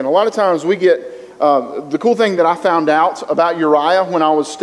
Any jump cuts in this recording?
no; 0 cuts

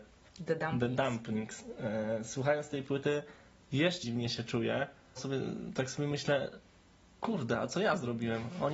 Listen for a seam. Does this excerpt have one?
yes; 2 cuts; at 4.0 s, 5.2 s

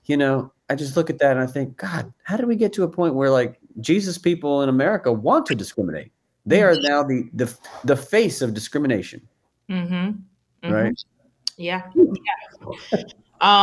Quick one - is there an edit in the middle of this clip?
no; 0 cuts

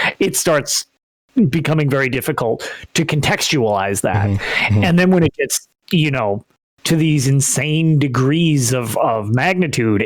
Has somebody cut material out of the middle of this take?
no; 0 cuts

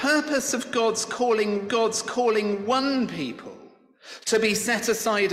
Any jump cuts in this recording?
yes; 1 cut; at 1.7 s

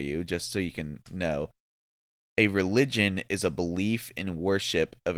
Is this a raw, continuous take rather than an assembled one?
yes; 0 cuts

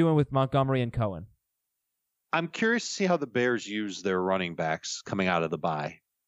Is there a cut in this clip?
no; 0 cuts

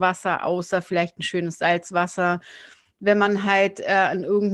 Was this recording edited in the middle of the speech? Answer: no; 0 cuts

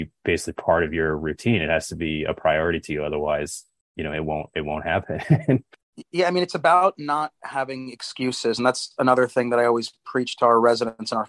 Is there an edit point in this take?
no; 0 cuts

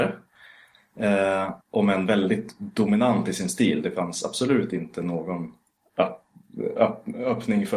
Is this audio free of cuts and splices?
no; 1 cut; at 1.6 s

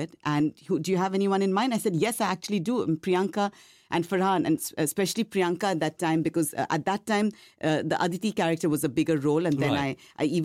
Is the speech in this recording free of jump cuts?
yes; 0 cuts

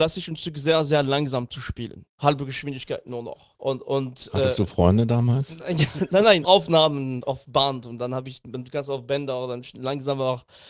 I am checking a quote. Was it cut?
yes; 4 cuts; at 2.1 s, 3.5 s, 6.4 s, 7.2 s

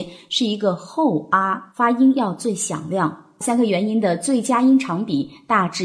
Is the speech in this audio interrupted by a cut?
yes; 1 cut; at 1.7 s

